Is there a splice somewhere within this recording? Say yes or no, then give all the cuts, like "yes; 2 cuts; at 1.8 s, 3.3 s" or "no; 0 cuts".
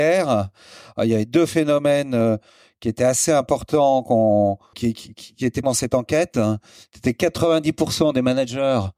yes; 2 cuts; at 4.7 s, 5.6 s